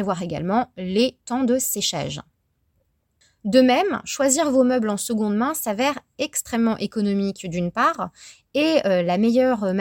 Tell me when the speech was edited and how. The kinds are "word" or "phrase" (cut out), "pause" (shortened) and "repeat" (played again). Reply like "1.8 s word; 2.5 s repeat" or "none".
none